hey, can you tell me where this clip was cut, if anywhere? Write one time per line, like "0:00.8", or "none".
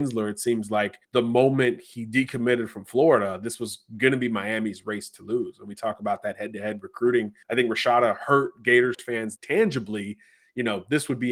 0:01.0
0:07.4
0:09.4